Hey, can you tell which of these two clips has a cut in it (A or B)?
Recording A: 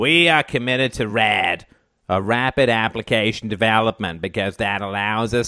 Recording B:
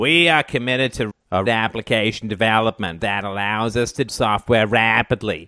B